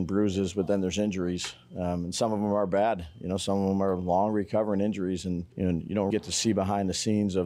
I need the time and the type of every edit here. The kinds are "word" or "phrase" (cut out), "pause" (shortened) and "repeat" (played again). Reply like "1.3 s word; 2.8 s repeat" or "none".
5.5 s pause; 6.1 s word